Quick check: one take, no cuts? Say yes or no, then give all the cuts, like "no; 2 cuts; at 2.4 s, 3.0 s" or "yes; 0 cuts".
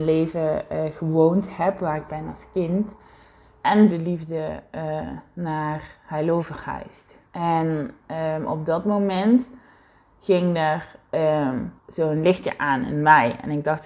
no; 4 cuts; at 2.1 s, 3.9 s, 7.3 s, 11.8 s